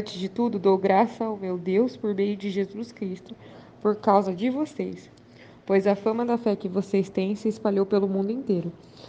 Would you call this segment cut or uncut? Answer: uncut